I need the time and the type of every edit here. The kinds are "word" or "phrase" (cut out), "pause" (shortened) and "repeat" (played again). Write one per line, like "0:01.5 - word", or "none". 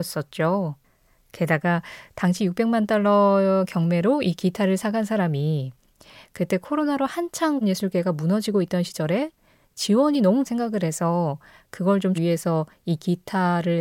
0:07.6 - word
0:10.4 - word
0:12.1 - word

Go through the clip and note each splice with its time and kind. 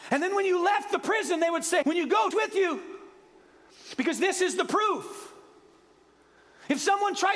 0:01.8 - word
0:02.3 - phrase

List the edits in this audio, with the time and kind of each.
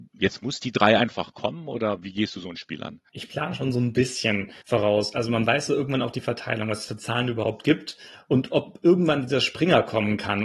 0:04.6 - pause

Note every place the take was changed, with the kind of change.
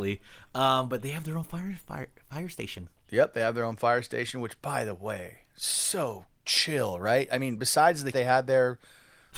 0:08.1 - phrase

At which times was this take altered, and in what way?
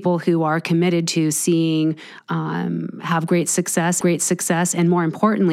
0:02.2 - phrase
0:04.0 - repeat

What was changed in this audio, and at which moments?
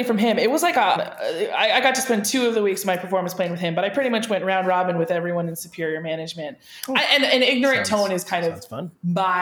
0:01.0 - word

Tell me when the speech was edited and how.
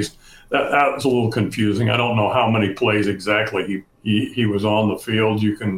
0:03.9 - pause

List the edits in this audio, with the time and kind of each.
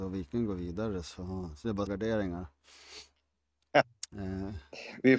0:01.9 - word

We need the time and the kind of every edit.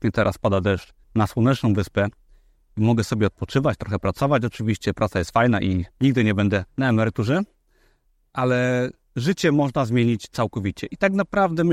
0:01.0 - pause
0:05.9 - pause
0:06.7 - pause

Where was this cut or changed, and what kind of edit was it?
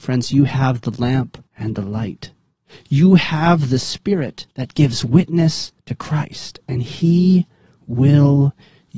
0:01.5 - pause
0:04.5 - pause
0:05.8 - pause

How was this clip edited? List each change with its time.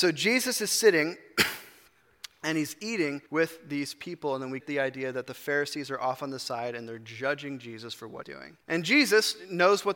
0:03.3 - pause
0:04.6 - word
0:08.2 - word
0:08.6 - pause

